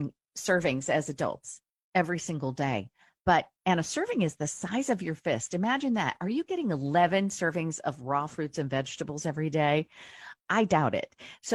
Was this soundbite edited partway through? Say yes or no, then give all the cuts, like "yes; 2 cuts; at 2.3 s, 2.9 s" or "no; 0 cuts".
no; 0 cuts